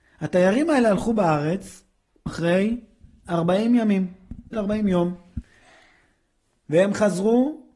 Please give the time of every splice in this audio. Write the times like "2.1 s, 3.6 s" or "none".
2.3 s, 4.5 s